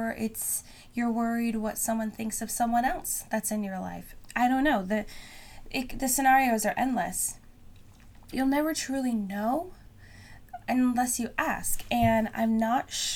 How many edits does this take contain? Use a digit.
1